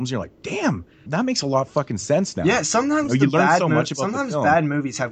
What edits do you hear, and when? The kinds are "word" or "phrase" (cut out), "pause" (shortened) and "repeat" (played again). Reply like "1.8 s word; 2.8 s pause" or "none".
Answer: 1.1 s word